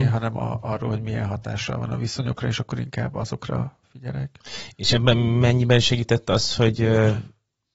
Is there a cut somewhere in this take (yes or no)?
no